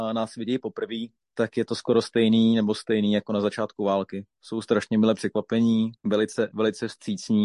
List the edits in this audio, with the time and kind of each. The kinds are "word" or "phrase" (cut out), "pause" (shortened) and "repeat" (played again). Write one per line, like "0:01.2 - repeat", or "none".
0:06.0 - pause